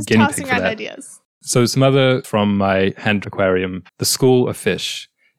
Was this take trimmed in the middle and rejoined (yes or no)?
yes